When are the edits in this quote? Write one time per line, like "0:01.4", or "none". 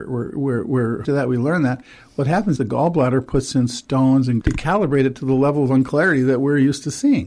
0:01.0
0:02.6
0:04.4